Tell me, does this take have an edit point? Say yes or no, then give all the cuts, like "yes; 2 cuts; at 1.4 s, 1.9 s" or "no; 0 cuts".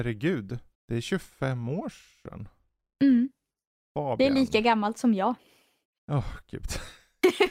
no; 0 cuts